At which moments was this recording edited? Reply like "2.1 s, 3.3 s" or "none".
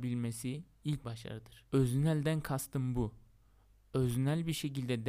1.0 s, 1.7 s